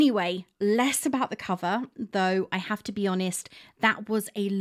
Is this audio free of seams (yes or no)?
yes